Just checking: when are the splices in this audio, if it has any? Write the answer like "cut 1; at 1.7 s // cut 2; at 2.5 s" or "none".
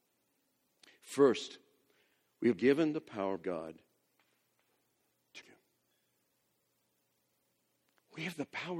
cut 1; at 2.6 s // cut 2; at 3.4 s // cut 3; at 5.4 s